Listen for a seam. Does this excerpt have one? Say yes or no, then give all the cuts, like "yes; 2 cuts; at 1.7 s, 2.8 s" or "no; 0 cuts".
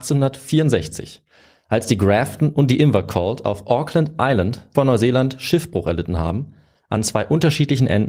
yes; 1 cut; at 4.7 s